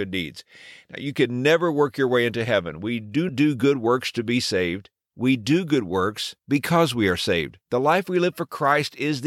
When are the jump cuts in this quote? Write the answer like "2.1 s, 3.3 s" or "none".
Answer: 3.3 s, 6.4 s, 7.6 s